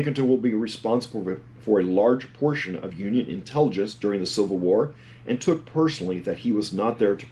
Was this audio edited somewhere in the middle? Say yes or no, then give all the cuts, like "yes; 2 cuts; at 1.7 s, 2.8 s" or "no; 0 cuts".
no; 0 cuts